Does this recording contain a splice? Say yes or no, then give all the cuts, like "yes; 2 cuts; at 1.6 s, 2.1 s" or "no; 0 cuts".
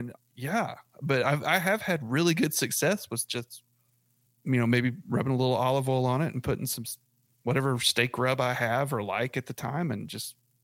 yes; 1 cut; at 4.3 s